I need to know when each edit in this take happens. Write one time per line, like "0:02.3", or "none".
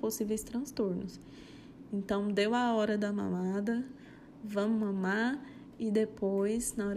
none